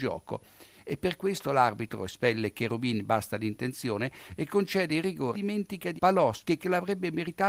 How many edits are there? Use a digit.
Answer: 2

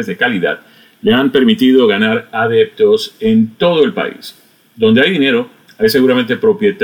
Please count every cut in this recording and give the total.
0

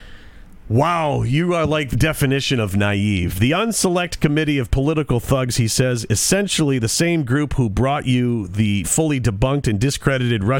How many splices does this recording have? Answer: 2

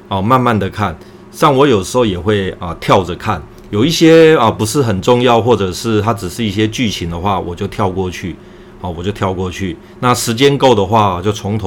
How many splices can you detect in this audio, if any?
0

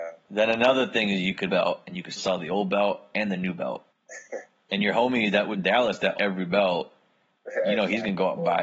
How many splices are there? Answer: 5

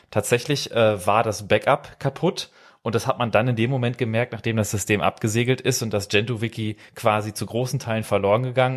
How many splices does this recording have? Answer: 0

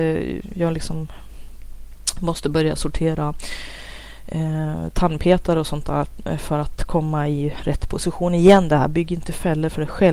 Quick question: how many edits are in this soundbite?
0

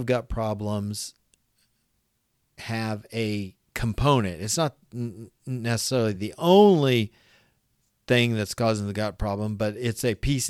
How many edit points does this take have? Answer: 0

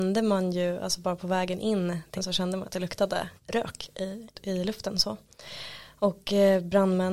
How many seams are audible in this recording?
3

